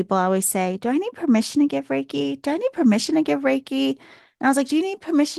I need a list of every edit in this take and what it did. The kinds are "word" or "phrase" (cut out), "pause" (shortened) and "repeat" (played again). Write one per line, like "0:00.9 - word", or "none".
none